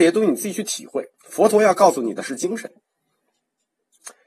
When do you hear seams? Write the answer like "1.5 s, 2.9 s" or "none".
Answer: 1.1 s